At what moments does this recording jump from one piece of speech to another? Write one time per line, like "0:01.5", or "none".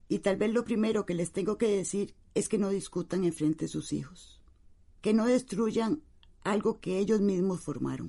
none